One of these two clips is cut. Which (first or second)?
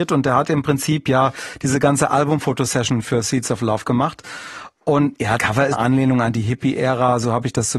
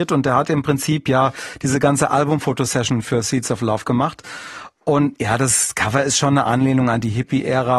first